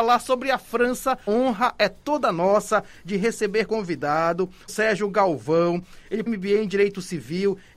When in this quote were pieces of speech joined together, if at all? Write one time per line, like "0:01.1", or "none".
0:01.3
0:03.7
0:04.7
0:06.3